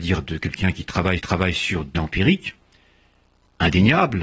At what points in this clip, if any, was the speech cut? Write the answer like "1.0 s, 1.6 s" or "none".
1.2 s, 1.9 s